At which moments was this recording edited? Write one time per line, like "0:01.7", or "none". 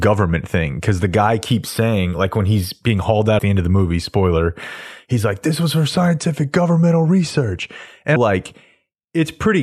0:03.4
0:08.2